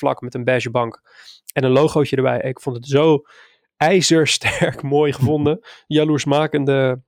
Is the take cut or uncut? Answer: uncut